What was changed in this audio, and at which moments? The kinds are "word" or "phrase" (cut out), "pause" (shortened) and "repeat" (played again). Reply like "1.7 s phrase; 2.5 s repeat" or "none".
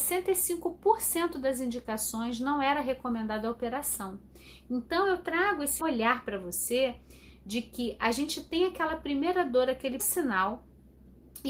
5.8 s phrase; 10.0 s word